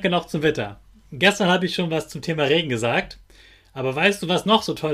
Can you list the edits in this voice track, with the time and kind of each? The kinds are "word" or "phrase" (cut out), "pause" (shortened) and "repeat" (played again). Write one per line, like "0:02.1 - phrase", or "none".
none

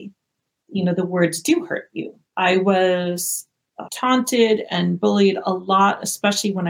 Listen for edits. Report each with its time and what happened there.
0:02.3 - pause
0:03.9 - word

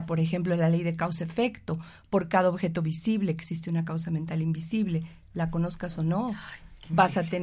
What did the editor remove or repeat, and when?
none

